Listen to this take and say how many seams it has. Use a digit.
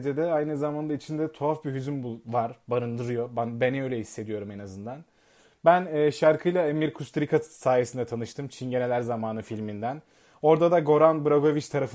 0